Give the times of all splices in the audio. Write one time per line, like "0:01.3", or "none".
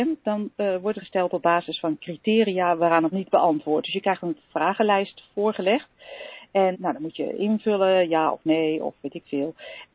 0:01.0
0:03.1
0:06.7